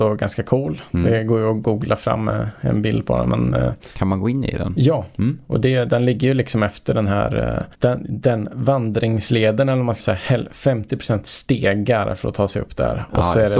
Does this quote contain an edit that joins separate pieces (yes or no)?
yes